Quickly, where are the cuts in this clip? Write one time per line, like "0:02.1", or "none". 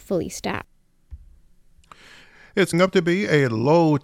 0:02.7